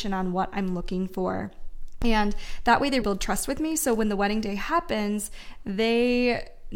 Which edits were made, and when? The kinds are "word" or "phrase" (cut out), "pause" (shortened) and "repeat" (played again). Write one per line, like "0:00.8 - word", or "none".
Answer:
0:03.0 - word